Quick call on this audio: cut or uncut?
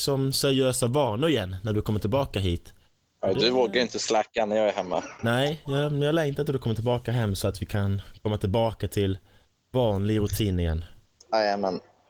uncut